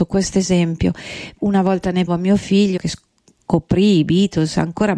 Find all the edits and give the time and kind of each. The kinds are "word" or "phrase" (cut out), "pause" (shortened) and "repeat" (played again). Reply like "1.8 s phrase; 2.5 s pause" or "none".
1.4 s word; 2.1 s word; 2.8 s word